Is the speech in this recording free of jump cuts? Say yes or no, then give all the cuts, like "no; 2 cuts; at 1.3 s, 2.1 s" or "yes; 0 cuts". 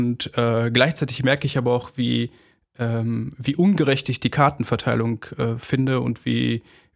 yes; 0 cuts